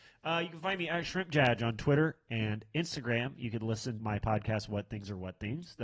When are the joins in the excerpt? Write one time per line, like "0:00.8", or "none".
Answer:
0:04.0